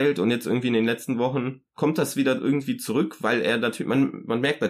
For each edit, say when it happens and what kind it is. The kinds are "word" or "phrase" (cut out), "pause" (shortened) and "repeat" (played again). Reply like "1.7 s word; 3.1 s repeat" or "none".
none